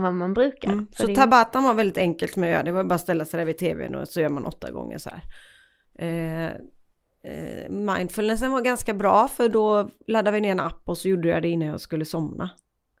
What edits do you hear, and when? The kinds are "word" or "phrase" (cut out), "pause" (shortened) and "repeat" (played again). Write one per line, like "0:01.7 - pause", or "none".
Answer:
none